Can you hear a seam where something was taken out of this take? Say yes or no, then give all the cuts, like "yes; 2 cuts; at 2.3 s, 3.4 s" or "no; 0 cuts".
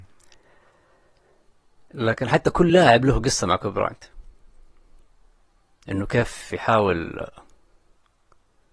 no; 0 cuts